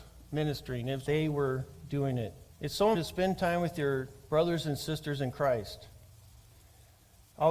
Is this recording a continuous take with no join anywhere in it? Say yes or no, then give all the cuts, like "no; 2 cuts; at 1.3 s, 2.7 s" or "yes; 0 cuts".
no; 3 cuts; at 1.1 s, 2.5 s, 2.9 s